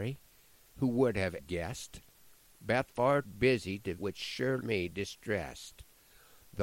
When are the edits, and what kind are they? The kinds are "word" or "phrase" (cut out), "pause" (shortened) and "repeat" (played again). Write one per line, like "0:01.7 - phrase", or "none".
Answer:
0:01.4 - word
0:02.9 - word
0:03.2 - word
0:04.0 - word
0:04.6 - word